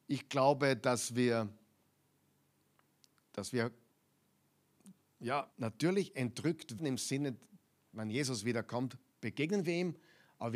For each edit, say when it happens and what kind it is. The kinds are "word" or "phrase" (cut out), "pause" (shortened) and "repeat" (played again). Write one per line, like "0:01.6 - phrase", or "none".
0:05.5 - pause
0:06.8 - word